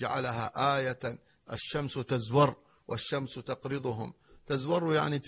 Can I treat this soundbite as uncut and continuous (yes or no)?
yes